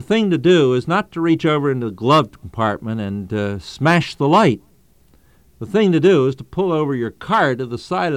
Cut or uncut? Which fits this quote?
uncut